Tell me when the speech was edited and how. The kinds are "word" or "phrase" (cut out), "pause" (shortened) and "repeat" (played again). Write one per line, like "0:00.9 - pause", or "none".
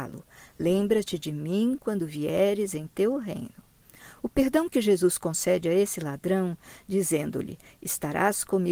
none